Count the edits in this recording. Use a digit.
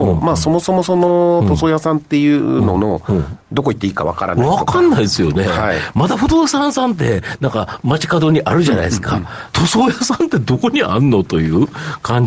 2